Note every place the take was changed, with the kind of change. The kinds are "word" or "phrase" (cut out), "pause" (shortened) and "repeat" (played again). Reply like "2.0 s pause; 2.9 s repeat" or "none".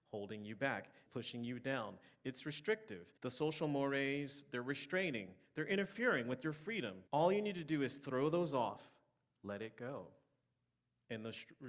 1.1 s word; 3.2 s pause; 7.1 s pause